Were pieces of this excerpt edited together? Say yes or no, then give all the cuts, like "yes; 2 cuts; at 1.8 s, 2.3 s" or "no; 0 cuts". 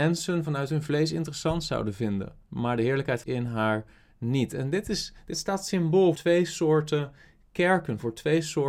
yes; 3 cuts; at 2.4 s, 3.2 s, 6.1 s